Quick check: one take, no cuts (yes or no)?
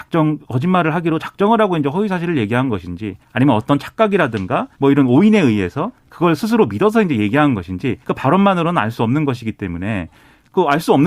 no